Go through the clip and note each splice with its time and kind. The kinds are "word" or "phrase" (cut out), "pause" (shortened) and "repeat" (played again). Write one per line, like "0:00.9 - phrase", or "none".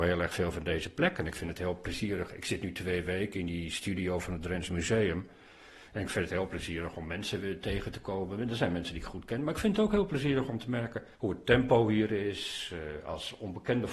0:11.1 - pause